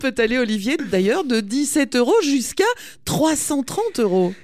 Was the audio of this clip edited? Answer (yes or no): no